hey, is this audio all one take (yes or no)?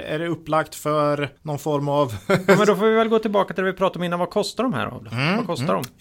no